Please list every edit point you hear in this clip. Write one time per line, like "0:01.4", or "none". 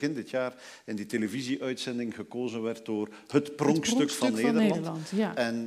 none